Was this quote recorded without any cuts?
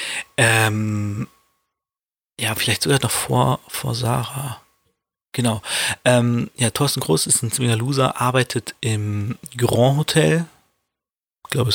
yes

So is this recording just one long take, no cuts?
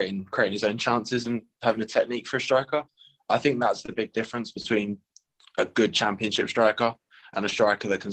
yes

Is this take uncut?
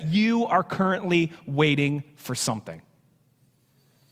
yes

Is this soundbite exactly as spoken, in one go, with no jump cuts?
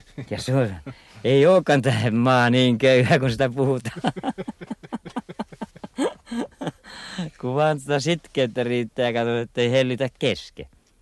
yes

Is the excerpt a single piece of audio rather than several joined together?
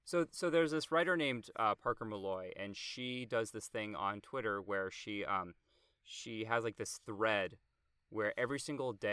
yes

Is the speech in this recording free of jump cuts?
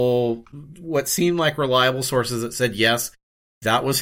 yes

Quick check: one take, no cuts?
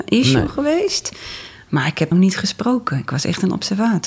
no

